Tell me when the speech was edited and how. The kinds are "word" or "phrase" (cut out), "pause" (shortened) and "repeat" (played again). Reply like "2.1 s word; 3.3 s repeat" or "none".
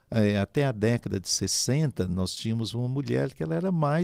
none